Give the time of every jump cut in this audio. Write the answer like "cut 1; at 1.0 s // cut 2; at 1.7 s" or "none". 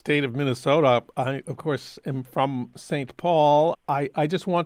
none